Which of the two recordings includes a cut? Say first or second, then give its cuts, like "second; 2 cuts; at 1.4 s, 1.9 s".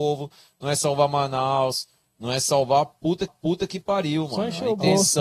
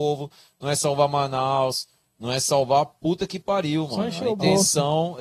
first; 1 cut; at 3.3 s